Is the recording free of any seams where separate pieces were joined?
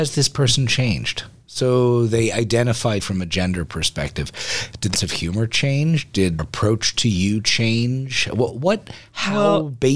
no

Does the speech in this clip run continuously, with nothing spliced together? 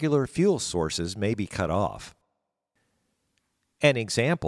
yes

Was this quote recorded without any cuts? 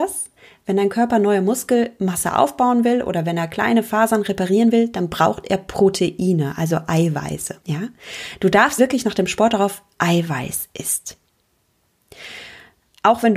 no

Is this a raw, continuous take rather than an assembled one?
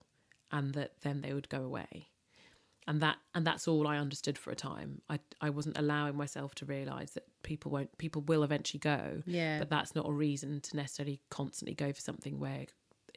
yes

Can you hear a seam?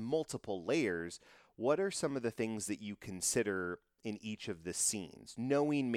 no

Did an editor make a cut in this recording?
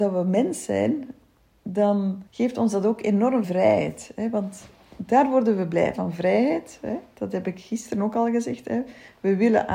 yes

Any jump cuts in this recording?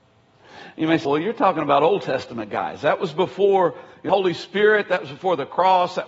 yes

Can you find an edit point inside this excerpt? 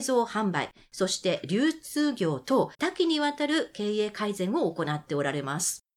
yes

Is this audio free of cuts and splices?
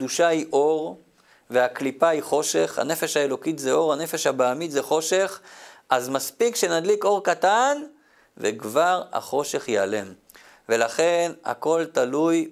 yes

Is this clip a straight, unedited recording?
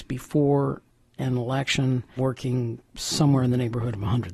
no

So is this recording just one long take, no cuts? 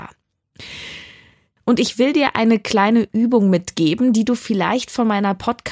yes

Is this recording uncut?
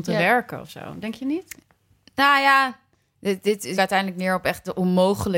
no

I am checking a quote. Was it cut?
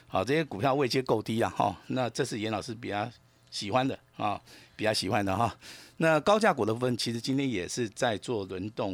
no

